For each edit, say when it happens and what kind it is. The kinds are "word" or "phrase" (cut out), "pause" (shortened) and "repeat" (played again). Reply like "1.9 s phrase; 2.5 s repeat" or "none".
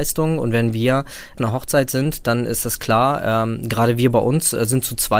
1.4 s phrase